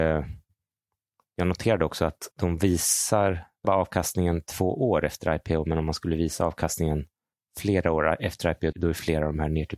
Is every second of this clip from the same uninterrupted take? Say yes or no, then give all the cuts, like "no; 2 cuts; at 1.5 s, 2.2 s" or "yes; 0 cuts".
no; 4 cuts; at 2.3 s, 3.6 s, 7.3 s, 8.7 s